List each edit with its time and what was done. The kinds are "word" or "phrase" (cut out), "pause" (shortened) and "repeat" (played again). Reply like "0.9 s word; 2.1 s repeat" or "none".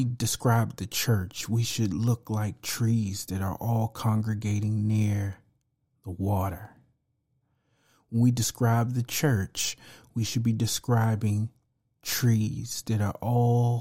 none